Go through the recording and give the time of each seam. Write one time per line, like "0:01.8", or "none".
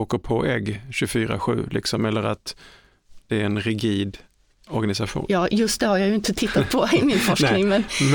none